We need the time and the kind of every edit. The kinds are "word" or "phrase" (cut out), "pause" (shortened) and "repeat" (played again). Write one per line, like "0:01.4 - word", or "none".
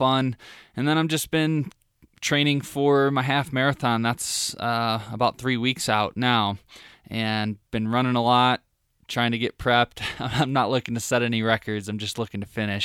none

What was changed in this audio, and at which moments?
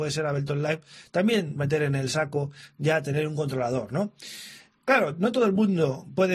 0:01.6 - word

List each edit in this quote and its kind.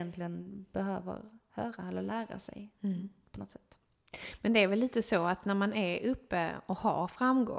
none

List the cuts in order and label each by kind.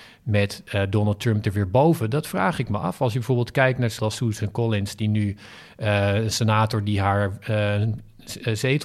0:04.0 - word

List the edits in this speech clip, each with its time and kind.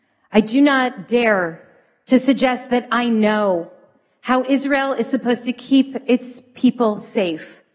none

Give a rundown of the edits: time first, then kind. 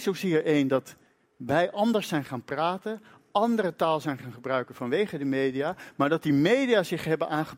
none

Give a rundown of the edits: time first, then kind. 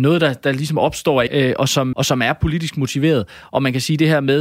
0:01.3 - word
0:01.9 - word

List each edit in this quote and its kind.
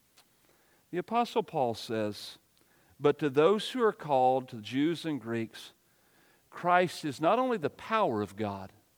none

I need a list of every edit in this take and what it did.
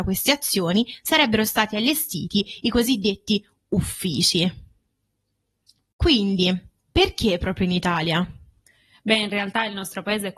none

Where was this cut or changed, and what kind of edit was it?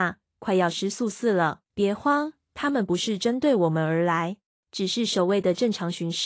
0:01.7 - pause
0:04.5 - pause

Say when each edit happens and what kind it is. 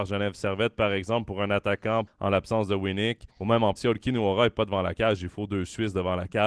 0:02.1 - phrase
0:03.3 - pause
0:03.8 - word

